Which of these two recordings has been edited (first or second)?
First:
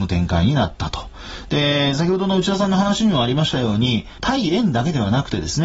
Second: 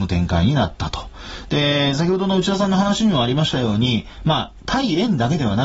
first